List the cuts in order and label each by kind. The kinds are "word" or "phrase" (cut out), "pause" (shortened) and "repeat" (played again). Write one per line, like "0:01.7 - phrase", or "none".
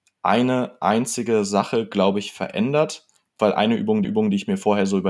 0:03.4 - word
0:04.0 - repeat